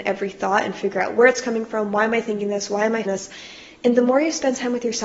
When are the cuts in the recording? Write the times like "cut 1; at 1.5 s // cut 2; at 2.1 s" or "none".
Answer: cut 1; at 3.0 s